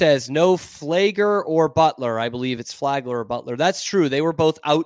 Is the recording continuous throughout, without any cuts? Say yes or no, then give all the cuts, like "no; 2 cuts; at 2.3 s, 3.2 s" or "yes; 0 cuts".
yes; 0 cuts